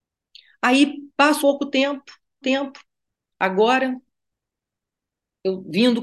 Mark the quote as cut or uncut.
cut